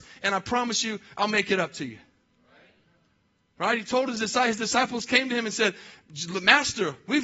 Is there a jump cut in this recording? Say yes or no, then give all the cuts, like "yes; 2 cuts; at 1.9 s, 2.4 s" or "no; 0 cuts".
no; 0 cuts